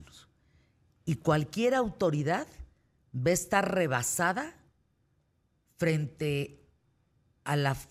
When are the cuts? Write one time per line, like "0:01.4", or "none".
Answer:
none